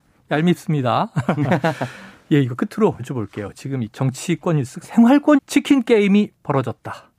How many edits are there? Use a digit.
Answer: 4